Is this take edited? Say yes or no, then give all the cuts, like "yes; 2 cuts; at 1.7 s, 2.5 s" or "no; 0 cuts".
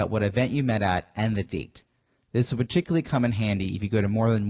no; 0 cuts